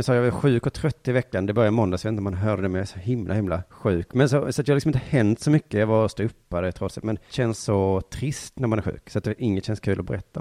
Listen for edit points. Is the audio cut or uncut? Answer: cut